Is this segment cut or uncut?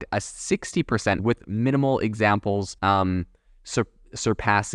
cut